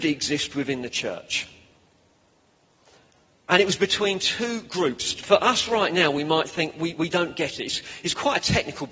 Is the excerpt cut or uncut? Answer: uncut